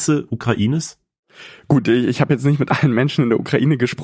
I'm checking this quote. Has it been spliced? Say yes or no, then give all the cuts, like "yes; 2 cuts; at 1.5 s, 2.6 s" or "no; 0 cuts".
no; 0 cuts